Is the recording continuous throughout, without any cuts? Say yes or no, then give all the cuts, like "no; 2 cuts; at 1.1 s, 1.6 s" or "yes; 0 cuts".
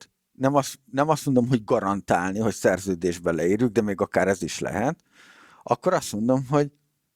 yes; 0 cuts